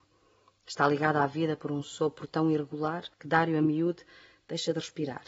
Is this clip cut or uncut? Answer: cut